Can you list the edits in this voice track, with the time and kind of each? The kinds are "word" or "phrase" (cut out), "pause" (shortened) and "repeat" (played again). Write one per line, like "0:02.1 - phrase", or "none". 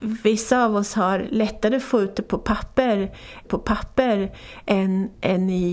0:03.4 - repeat